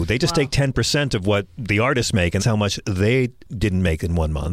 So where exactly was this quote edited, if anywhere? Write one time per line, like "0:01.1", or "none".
0:02.4